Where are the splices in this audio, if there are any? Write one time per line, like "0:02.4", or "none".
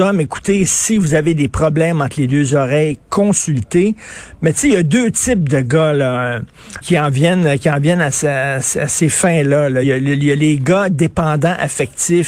0:06.8
0:09.8